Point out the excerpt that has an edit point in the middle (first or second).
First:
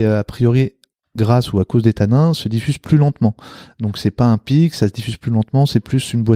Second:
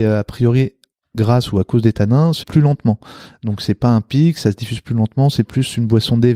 second